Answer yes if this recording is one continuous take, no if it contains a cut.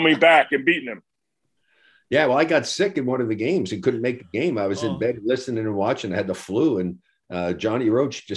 yes